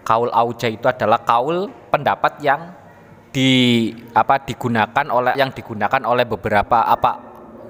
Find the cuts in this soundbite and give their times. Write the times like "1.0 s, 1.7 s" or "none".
5.3 s